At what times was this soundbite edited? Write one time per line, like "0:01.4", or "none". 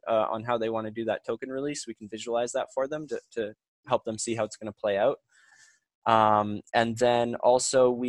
none